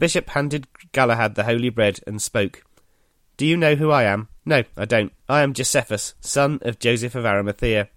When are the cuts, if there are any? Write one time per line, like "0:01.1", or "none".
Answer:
0:04.4
0:05.2